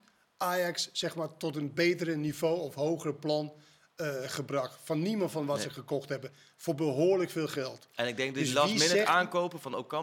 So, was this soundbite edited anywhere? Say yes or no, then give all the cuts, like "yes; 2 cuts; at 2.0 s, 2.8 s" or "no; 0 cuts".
no; 0 cuts